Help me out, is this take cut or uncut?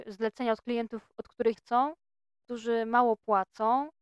cut